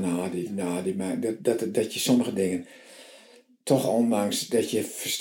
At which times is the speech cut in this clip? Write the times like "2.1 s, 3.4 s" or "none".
none